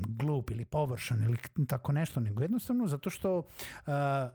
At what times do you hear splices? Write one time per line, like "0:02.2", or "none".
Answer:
none

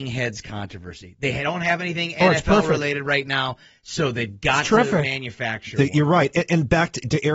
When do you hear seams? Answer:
none

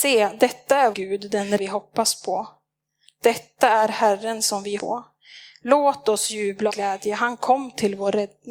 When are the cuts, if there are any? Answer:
0:00.9
0:01.6
0:04.8
0:06.7

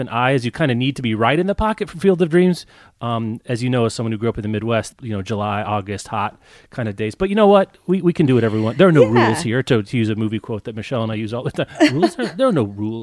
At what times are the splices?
0:04.9

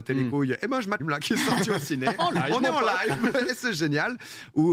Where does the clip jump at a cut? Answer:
0:01.0

